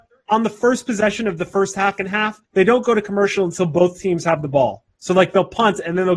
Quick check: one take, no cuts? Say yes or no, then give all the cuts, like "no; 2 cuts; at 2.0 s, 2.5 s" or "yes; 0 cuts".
no; 2 cuts; at 2.0 s, 2.4 s